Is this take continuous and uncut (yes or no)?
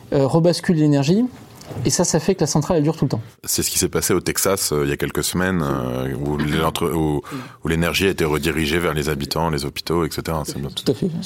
yes